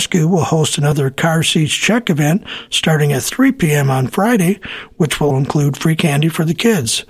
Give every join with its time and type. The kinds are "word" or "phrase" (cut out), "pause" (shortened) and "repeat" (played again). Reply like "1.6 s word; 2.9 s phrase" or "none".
5.3 s word